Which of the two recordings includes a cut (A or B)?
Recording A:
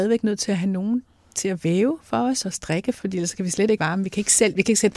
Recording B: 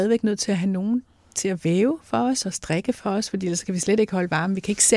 A